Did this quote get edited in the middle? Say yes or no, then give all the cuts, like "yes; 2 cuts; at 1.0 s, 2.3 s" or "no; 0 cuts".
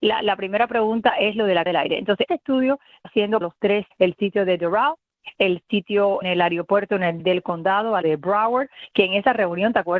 yes; 8 cuts; at 1.7 s, 2.3 s, 3.0 s, 3.4 s, 3.9 s, 6.2 s, 7.2 s, 8.0 s